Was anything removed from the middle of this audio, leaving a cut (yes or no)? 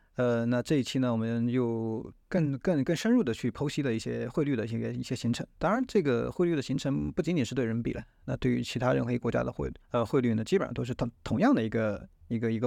yes